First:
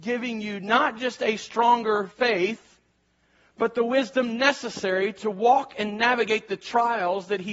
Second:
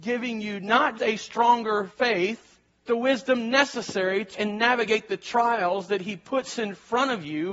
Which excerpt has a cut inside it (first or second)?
second